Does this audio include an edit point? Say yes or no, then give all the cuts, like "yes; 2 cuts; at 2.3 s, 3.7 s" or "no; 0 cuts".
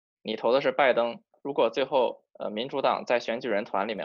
yes; 1 cut; at 2.3 s